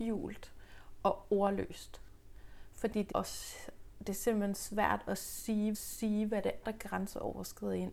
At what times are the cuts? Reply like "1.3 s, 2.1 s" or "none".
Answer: 3.1 s, 5.7 s, 6.6 s